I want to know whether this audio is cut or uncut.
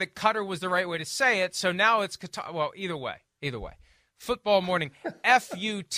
uncut